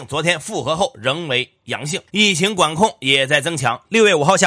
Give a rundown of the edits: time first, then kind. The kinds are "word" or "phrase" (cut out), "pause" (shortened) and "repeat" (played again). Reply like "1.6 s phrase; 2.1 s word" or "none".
2.1 s pause